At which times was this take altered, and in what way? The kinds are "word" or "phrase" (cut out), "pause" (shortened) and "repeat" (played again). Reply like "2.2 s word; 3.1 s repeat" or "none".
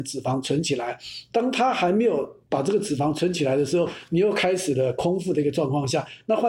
2.4 s pause